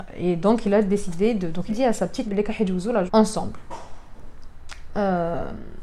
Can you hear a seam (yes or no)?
yes